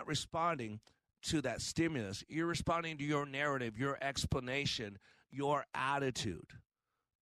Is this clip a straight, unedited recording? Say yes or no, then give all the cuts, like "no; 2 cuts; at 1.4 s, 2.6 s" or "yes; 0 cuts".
yes; 0 cuts